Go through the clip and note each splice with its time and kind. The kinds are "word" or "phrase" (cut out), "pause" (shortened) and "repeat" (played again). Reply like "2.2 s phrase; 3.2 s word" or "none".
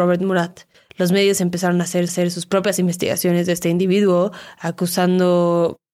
2.1 s repeat